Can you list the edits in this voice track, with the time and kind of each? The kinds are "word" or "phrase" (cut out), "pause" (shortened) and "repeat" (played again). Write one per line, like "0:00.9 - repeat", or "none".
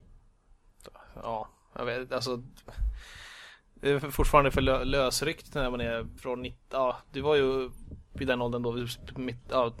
0:06.2 - pause